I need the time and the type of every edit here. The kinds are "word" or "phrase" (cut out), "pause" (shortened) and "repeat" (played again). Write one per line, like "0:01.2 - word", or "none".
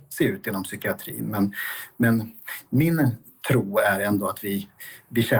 none